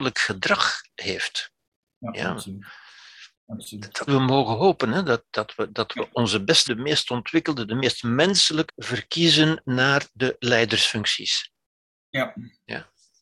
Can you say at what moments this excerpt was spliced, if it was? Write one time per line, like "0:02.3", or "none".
0:03.3
0:04.1
0:06.7
0:08.7

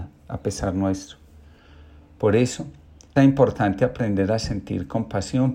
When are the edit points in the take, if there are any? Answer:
0:03.2

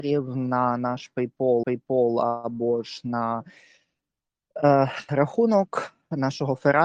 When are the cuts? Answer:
0:01.6
0:05.1

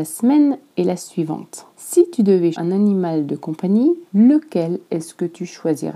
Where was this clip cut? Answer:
0:01.7
0:02.5
0:04.1

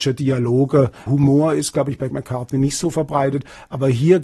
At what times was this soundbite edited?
0:01.1
0:02.1

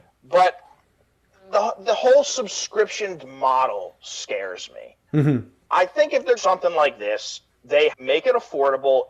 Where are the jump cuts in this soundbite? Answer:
0:03.2
0:06.4
0:07.9

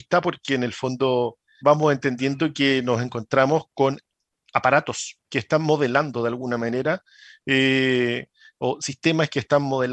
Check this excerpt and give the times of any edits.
0:01.6
0:05.2

